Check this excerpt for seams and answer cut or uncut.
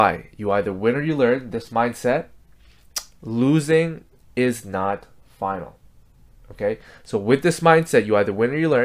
uncut